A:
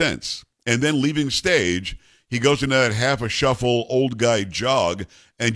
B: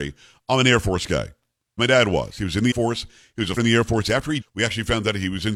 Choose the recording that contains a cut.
B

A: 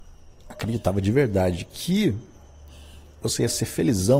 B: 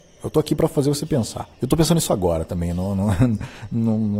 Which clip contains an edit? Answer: B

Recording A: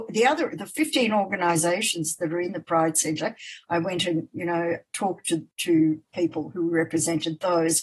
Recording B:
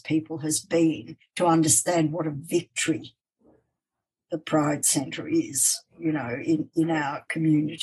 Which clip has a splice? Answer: A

